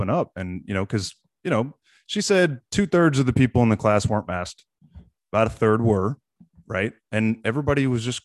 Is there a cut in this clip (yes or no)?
no